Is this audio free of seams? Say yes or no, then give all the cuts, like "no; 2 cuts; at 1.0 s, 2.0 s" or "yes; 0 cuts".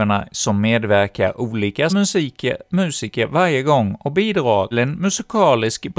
no; 2 cuts; at 1.9 s, 4.7 s